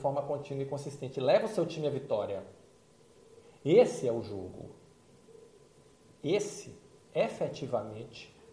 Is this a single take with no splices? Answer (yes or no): yes